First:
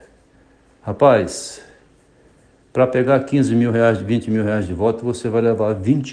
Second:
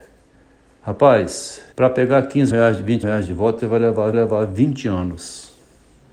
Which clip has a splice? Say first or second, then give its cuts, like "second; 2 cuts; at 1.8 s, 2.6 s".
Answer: second; 5 cuts; at 1.7 s, 2.5 s, 3.0 s, 3.6 s, 4.1 s